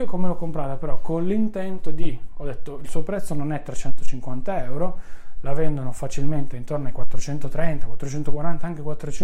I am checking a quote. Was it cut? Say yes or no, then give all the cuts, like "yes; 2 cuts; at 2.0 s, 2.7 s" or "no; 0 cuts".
no; 0 cuts